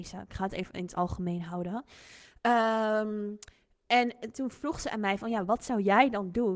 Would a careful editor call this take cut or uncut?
uncut